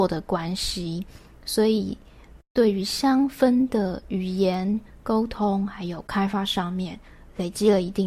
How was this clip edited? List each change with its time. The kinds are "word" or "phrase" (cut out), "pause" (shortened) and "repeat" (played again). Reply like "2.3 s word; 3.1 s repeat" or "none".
none